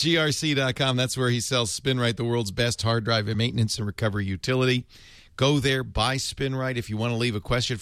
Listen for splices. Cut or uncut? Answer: uncut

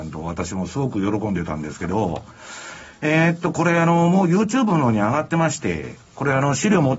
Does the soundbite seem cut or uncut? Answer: uncut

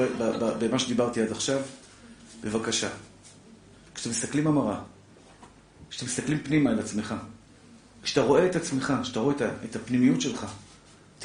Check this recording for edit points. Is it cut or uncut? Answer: uncut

